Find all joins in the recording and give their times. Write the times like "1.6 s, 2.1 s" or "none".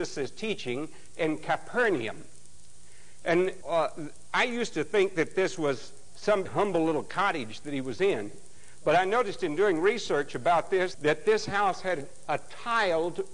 3.6 s, 6.5 s, 10.9 s